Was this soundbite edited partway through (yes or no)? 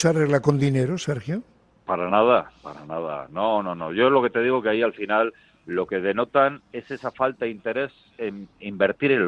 no